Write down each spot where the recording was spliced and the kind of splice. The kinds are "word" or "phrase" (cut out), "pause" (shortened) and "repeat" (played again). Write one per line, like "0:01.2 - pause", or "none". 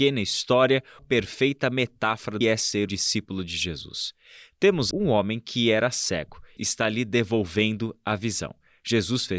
0:01.0 - word
0:02.4 - phrase
0:02.9 - word
0:04.9 - word
0:06.6 - phrase